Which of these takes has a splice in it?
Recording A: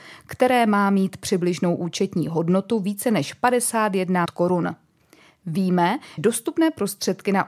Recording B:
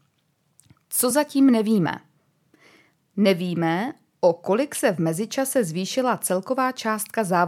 A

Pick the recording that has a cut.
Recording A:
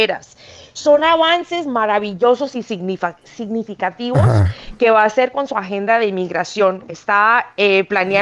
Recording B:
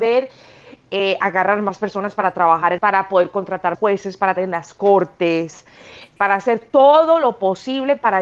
B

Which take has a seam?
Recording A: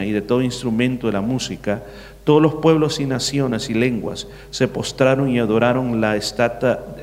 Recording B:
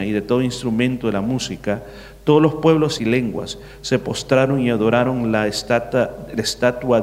B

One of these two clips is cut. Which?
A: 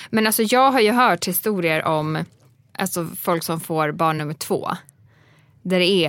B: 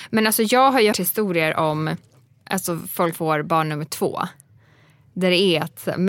B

